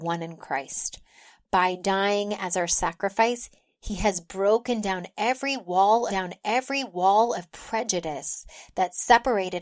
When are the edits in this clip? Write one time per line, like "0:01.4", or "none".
0:06.1

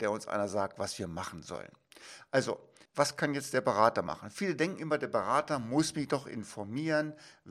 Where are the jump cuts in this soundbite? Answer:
0:02.9

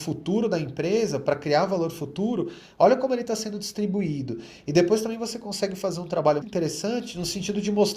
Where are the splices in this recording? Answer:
0:06.4

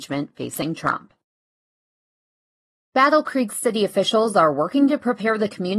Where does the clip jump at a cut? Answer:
none

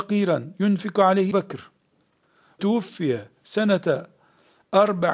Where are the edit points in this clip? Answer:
0:01.3
0:02.6

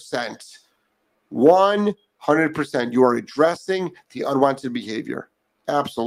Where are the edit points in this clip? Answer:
none

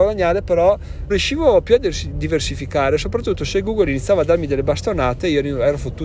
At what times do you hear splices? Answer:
0:01.1

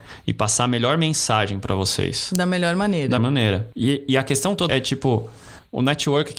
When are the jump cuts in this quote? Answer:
0:03.2
0:04.7

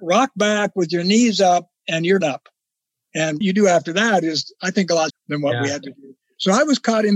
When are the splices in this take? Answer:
0:02.2
0:03.4
0:05.1

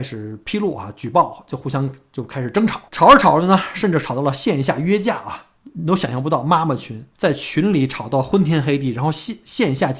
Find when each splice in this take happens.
0:02.9
0:05.6
0:07.1

